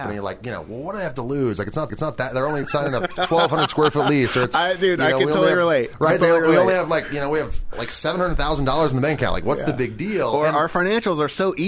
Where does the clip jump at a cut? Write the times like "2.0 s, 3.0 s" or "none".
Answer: 1.9 s